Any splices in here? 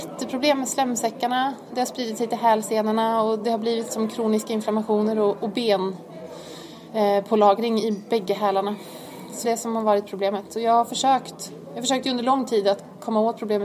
yes; 1 cut; at 9.4 s

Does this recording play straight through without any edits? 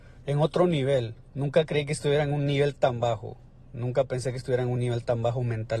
yes; 0 cuts

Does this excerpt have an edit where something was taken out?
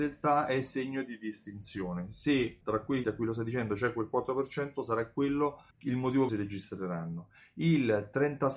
yes; 4 cuts; at 2.6 s, 3.0 s, 5.7 s, 6.3 s

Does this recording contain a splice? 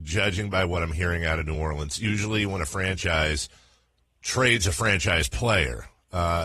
no; 0 cuts

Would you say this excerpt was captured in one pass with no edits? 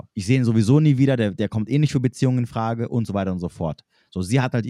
yes; 0 cuts

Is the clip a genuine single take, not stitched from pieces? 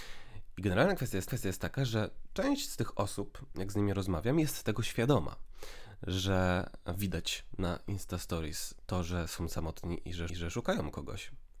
no; 2 cuts; at 1.3 s, 10.3 s

